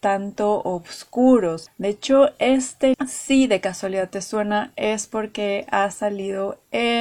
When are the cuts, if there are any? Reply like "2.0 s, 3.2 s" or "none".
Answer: 2.9 s